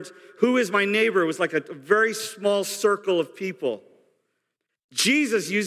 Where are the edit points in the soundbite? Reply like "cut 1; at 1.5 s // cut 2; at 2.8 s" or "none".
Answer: none